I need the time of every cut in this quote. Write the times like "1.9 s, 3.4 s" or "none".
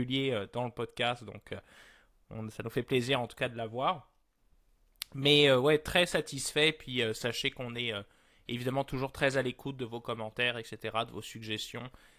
none